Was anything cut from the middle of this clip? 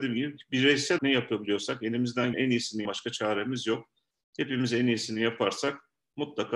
yes; 3 cuts; at 1.0 s, 2.3 s, 2.8 s

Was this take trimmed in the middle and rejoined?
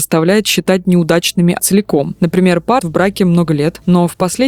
yes; 2 cuts; at 1.6 s, 2.8 s

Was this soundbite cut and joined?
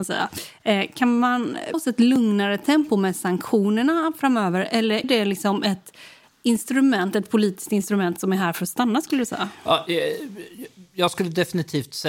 yes; 2 cuts; at 1.7 s, 5.0 s

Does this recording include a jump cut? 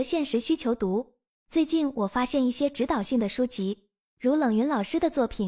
no; 0 cuts

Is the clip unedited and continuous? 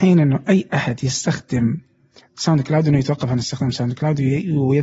yes; 0 cuts

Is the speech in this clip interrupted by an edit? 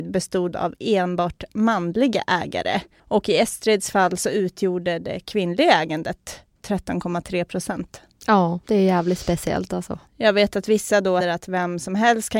yes; 4 cuts; at 6.6 s, 8.6 s, 10.1 s, 11.2 s

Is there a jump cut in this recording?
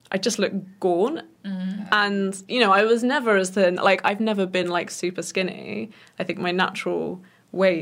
no; 0 cuts

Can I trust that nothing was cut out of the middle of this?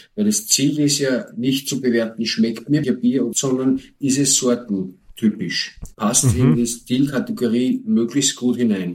no; 3 cuts; at 2.8 s, 3.3 s, 5.9 s

